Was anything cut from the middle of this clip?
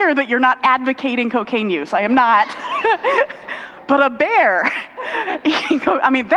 no; 0 cuts

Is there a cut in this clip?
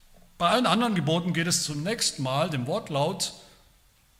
no; 0 cuts

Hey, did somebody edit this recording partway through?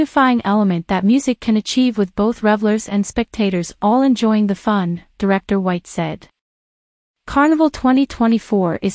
no; 0 cuts

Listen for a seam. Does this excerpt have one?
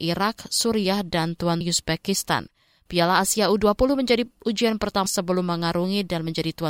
yes; 2 cuts; at 1.6 s, 5.1 s

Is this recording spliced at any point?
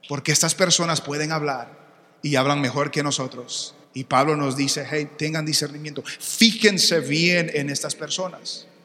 yes; 1 cut; at 3.8 s

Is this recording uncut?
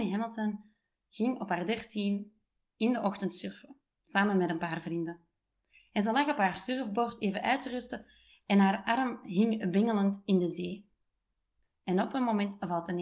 yes; 0 cuts

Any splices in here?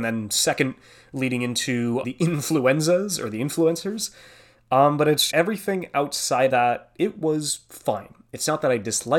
yes; 3 cuts; at 2.0 s, 5.3 s, 6.5 s

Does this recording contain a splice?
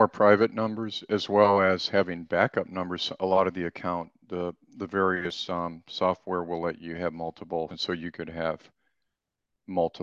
yes; 1 cut; at 7.7 s

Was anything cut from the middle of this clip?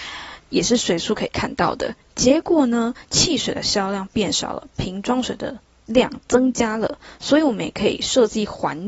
no; 0 cuts

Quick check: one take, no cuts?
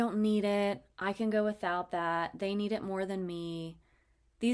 yes; 0 cuts

